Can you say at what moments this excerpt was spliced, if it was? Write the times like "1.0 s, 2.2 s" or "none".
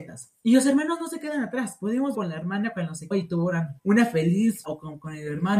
2.1 s, 3.1 s, 3.8 s, 4.6 s